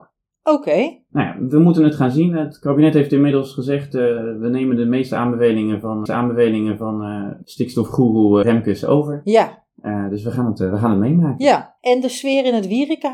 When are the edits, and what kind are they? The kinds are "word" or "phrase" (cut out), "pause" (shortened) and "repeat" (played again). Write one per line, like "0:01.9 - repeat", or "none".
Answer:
0:06.1 - repeat
0:08.4 - word
0:11.8 - pause